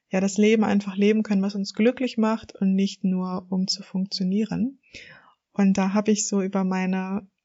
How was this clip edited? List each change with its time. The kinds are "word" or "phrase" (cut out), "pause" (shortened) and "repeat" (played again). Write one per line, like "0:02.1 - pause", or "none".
none